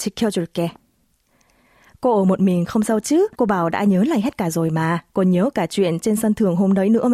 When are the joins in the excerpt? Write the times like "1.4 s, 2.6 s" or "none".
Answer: 3.3 s, 5.1 s